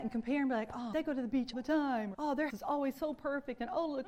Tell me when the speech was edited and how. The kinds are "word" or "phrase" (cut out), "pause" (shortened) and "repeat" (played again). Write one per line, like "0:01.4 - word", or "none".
0:00.9 - word
0:01.5 - word
0:02.1 - word
0:02.5 - word